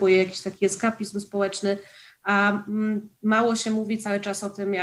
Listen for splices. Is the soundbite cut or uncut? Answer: uncut